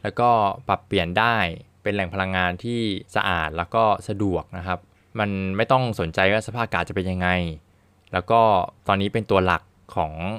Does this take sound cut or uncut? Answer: cut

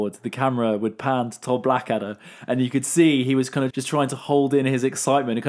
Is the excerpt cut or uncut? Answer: cut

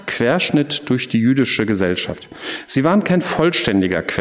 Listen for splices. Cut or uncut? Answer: uncut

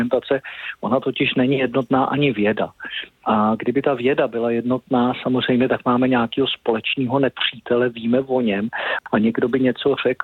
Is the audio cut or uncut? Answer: uncut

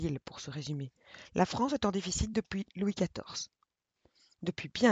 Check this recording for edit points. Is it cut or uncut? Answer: uncut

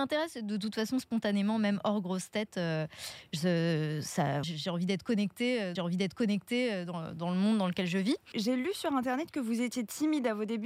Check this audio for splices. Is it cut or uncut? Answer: cut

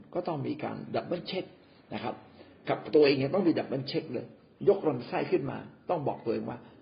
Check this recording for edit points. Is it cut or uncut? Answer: uncut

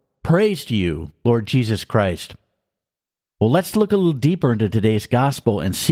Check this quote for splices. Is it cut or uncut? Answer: uncut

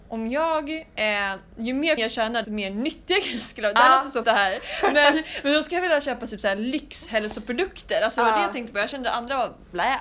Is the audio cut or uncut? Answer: cut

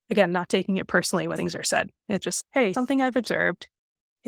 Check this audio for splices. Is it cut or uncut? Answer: cut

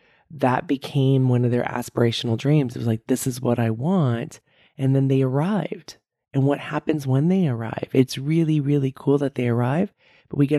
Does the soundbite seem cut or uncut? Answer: uncut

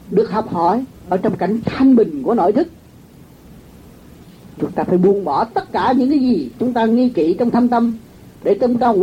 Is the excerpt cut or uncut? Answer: cut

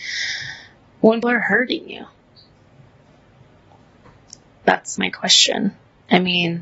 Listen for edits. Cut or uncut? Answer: cut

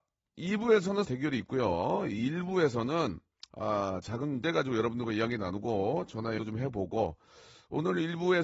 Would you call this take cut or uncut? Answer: cut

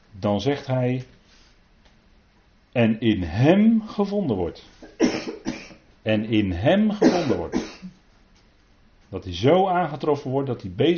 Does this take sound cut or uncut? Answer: uncut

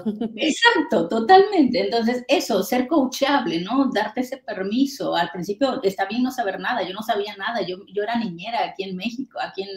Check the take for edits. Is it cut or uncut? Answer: uncut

